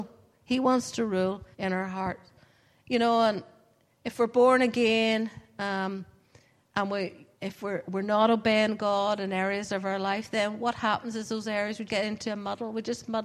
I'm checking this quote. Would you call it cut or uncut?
cut